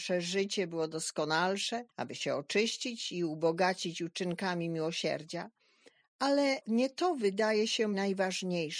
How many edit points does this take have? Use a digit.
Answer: 1